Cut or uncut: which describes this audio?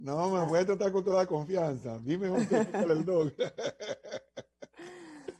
uncut